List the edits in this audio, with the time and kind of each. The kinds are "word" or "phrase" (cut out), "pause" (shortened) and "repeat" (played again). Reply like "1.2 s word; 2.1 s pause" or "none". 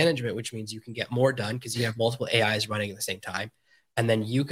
none